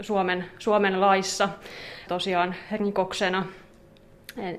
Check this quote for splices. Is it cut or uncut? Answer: cut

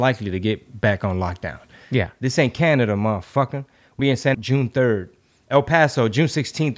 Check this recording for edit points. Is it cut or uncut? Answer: cut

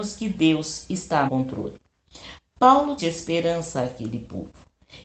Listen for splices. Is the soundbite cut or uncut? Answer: cut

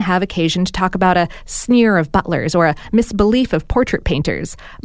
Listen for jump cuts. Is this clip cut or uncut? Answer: uncut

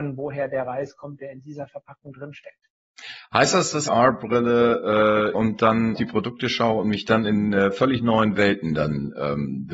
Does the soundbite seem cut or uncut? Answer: cut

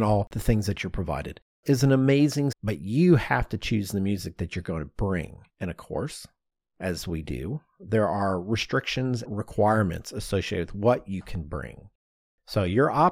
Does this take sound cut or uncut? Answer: cut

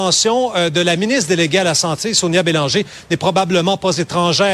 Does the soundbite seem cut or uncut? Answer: uncut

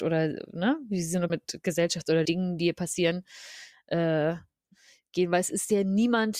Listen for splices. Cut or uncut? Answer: cut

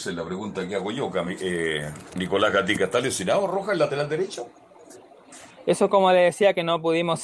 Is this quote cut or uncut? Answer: uncut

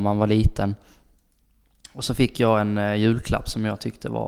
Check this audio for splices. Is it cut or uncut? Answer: uncut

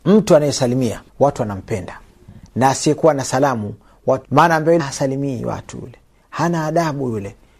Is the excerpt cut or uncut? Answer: cut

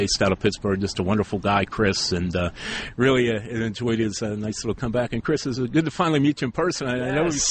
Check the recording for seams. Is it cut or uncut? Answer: uncut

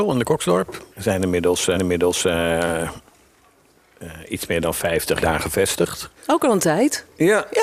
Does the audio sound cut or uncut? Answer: cut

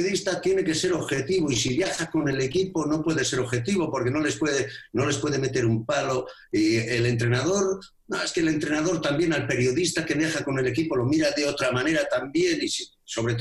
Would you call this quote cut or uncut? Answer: uncut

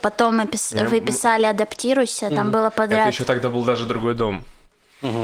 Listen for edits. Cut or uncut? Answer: uncut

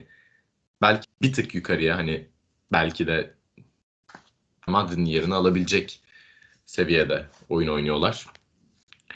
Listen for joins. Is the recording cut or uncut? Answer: cut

